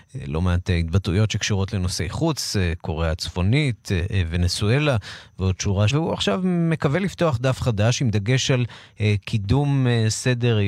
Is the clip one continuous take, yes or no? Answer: no